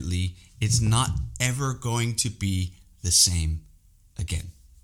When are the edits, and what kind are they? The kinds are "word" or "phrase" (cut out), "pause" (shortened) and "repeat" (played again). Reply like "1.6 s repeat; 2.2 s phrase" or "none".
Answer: none